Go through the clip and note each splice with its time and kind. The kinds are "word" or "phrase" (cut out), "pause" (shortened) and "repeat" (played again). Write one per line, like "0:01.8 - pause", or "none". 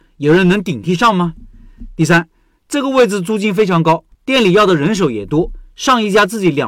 0:04.1 - pause

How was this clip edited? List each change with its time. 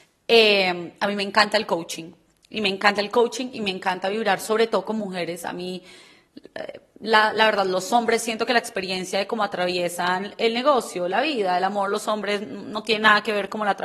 none

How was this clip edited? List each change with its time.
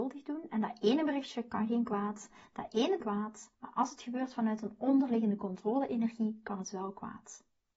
0:03.0 - phrase
0:03.5 - pause

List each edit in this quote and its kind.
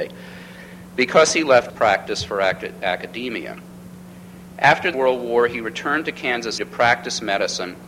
0:01.7 - word
0:04.9 - word
0:06.6 - word

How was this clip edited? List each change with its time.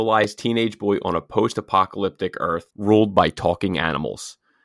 0:02.7 - pause

